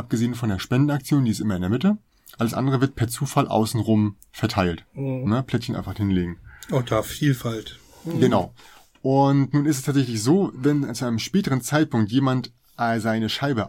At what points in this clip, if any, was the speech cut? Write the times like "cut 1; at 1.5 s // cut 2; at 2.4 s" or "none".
none